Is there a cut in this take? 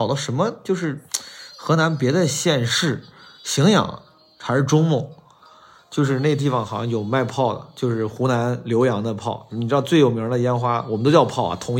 no; 0 cuts

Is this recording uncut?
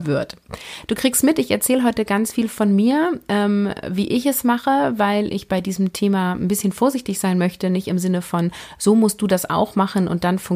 yes; 0 cuts

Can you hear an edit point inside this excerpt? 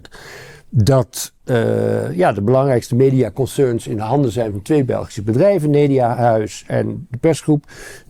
no; 0 cuts

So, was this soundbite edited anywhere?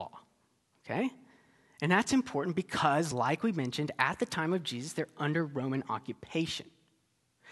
no; 0 cuts

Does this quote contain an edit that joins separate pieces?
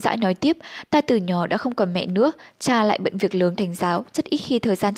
yes; 1 cut; at 3.6 s

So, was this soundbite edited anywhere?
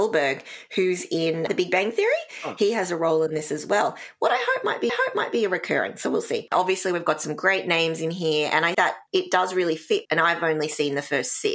yes; 5 cuts; at 1.5 s, 4.9 s, 8.7 s, 9.1 s, 10.0 s

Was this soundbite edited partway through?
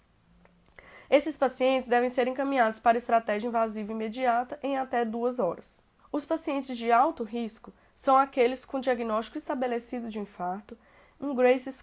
yes; 1 cut; at 6.0 s

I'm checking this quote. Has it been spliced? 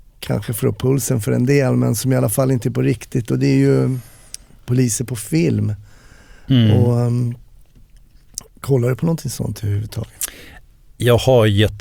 no; 0 cuts

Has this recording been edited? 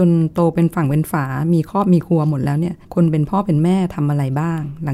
yes; 1 cut; at 2.8 s

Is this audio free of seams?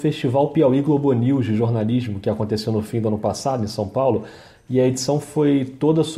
yes; 0 cuts

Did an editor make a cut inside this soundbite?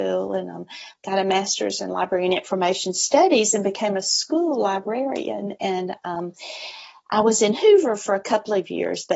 no; 0 cuts

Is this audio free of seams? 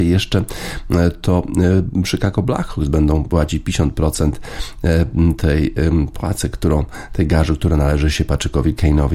yes; 0 cuts

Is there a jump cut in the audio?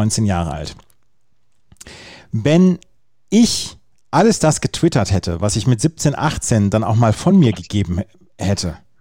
no; 0 cuts

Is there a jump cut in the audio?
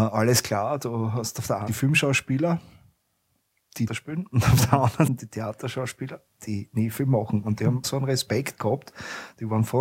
yes; 4 cuts; at 1.7 s, 3.9 s, 5.1 s, 7.8 s

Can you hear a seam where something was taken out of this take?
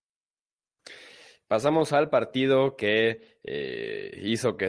no; 0 cuts

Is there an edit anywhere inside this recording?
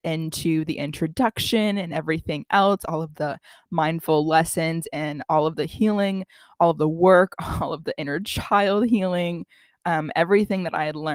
no; 0 cuts

